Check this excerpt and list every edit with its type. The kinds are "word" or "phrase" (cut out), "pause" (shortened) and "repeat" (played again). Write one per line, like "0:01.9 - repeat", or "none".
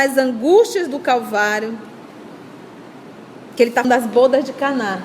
0:03.8 - word